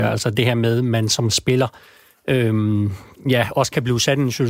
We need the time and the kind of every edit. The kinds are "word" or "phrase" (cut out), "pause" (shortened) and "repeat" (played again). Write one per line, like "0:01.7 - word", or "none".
none

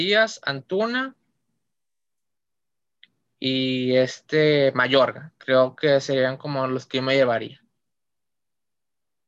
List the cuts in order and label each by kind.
none

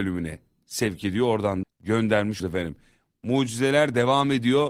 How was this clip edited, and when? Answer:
0:01.6 - word
0:02.4 - word

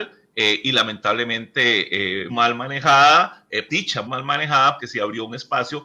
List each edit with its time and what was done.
0:02.3 - word
0:03.7 - word
0:04.1 - word
0:04.8 - word

